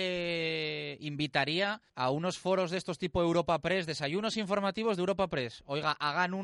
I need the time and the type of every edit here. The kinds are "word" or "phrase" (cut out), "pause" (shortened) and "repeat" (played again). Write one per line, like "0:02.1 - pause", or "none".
0:01.9 - pause